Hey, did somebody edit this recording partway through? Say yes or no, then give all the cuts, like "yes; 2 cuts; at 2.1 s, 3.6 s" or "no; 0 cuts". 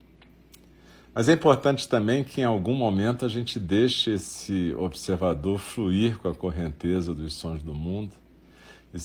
no; 0 cuts